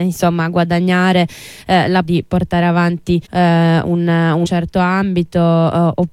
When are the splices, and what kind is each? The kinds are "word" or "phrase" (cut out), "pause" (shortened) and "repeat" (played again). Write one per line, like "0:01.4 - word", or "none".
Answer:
0:02.0 - phrase
0:03.3 - pause
0:04.4 - phrase